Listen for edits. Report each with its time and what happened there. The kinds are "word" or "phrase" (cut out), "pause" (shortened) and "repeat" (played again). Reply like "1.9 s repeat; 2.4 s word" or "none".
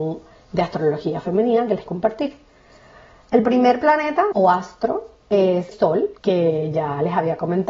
1.9 s word; 4.3 s word; 5.7 s word; 6.2 s pause